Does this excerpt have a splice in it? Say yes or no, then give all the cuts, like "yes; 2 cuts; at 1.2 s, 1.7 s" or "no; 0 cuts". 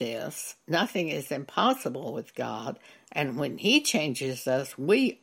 no; 0 cuts